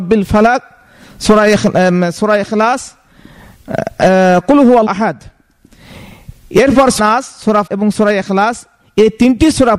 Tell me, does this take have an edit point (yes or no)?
yes